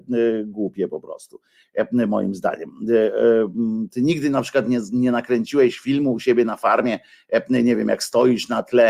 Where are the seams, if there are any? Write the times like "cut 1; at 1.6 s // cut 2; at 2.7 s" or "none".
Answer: none

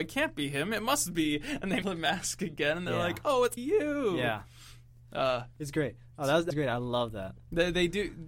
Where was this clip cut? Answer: cut 1; at 1.8 s // cut 2; at 3.6 s // cut 3; at 6.5 s

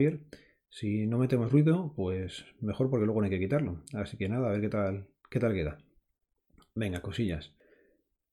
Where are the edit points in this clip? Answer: none

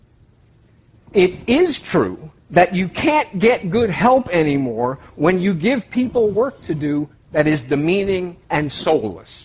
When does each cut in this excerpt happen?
cut 1; at 2.4 s // cut 2; at 8.4 s

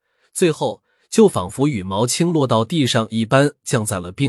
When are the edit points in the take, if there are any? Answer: none

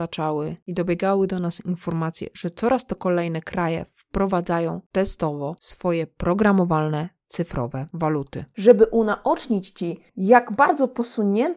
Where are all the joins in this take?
cut 1; at 10.1 s

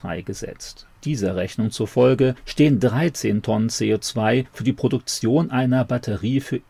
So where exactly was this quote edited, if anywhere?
cut 1; at 0.9 s

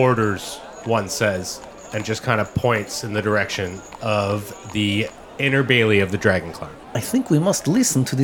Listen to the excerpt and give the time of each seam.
cut 1; at 6.8 s

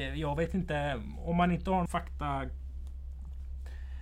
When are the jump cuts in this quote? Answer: cut 1; at 1.9 s

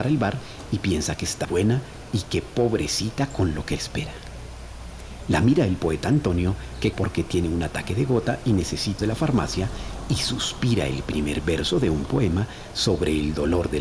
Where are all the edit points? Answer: cut 1; at 1.4 s // cut 2; at 3.8 s // cut 3; at 6.9 s // cut 4; at 9.0 s

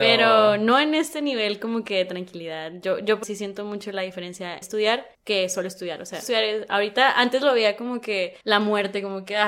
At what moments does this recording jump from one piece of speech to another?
cut 1; at 3.2 s // cut 2; at 4.6 s // cut 3; at 5.1 s // cut 4; at 6.2 s // cut 5; at 8.4 s

